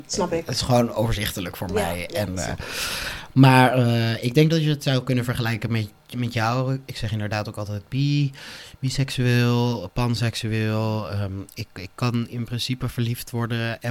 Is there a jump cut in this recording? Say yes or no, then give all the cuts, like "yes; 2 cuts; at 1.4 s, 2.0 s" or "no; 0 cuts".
no; 0 cuts